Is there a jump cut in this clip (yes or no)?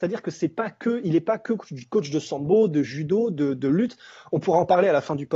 no